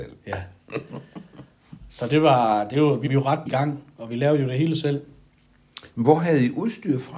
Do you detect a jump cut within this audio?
yes; 2 cuts; at 3.1 s, 3.5 s

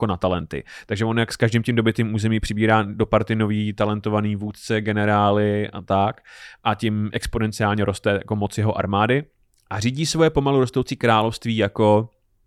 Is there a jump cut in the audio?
no; 0 cuts

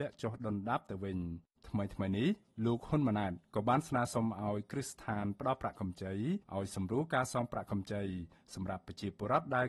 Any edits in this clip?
yes; 2 cuts; at 1.6 s, 6.4 s

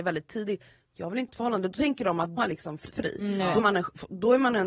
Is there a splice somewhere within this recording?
yes; 4 cuts; at 1.3 s, 2.4 s, 2.9 s, 3.6 s

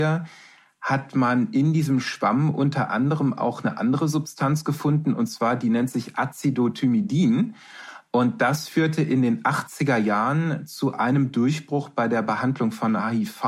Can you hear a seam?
no; 0 cuts

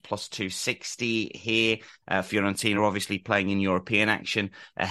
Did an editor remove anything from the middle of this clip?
no; 0 cuts

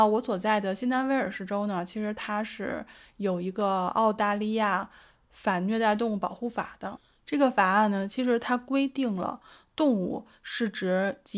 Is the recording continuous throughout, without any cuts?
yes; 0 cuts

